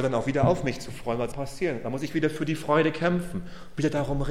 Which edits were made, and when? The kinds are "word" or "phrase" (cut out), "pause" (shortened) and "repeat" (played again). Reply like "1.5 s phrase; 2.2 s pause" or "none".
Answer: 1.3 s word